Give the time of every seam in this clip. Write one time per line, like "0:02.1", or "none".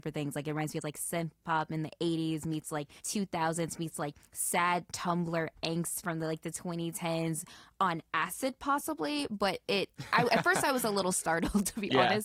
0:03.0